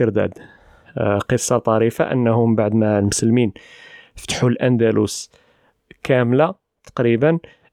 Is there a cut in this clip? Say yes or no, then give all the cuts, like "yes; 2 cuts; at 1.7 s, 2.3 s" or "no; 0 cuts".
no; 0 cuts